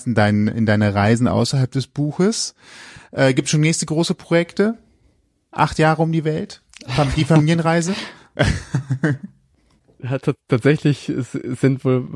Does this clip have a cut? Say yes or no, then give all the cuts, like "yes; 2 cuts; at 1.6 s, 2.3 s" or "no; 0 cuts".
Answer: no; 0 cuts